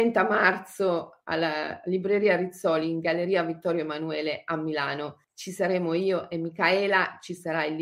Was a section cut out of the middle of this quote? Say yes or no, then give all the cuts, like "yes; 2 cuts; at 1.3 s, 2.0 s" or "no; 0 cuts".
yes; 1 cut; at 5.2 s